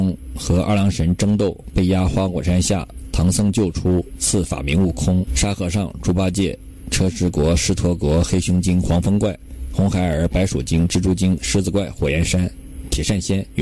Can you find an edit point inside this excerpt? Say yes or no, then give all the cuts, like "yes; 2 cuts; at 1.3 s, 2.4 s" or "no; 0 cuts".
yes; 2 cuts; at 5.3 s, 11.4 s